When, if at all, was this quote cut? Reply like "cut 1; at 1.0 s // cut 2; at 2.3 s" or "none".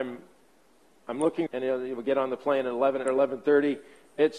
cut 1; at 1.5 s // cut 2; at 3.1 s